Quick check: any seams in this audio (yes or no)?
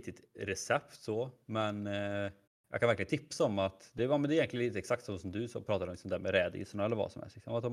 yes